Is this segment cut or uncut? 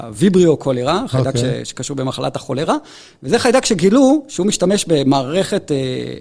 uncut